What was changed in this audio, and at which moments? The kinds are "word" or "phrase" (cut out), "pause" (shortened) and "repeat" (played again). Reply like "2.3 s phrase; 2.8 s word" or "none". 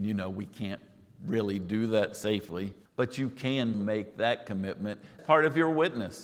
2.8 s pause; 3.7 s word; 5.2 s word